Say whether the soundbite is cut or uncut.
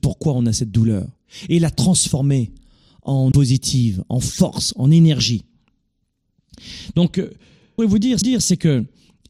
cut